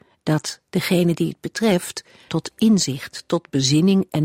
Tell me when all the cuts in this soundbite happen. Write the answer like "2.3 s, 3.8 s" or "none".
2.3 s